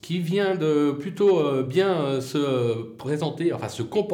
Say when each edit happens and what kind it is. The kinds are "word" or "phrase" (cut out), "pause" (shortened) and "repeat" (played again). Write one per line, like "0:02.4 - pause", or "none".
none